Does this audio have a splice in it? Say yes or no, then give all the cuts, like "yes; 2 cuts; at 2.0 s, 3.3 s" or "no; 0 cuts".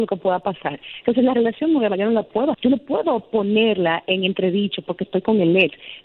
yes; 1 cut; at 2.5 s